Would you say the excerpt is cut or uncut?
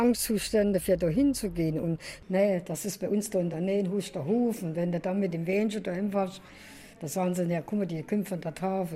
uncut